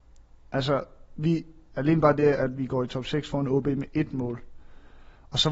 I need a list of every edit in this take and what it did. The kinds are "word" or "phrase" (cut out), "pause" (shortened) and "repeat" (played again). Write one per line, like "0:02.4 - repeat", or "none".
none